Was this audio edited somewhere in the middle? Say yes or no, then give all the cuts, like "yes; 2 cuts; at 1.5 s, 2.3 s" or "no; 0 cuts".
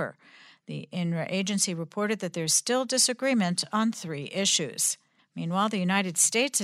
yes; 1 cut; at 5.2 s